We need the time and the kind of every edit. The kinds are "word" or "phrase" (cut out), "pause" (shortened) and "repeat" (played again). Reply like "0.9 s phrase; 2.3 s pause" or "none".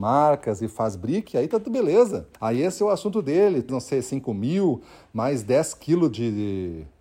2.4 s pause; 3.7 s phrase